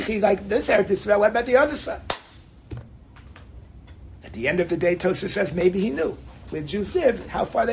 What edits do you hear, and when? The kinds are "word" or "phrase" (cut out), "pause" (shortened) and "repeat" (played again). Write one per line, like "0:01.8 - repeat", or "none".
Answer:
none